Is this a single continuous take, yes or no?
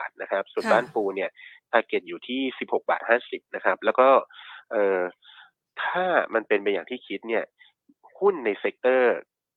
yes